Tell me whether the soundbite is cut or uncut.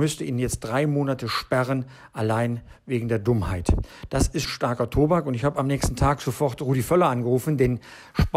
cut